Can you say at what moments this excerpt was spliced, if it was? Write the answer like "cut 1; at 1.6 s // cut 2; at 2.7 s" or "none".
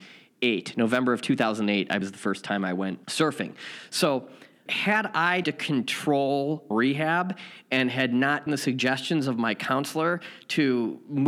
cut 1; at 2.0 s // cut 2; at 3.0 s // cut 3; at 4.7 s // cut 4; at 5.4 s // cut 5; at 6.7 s // cut 6; at 8.5 s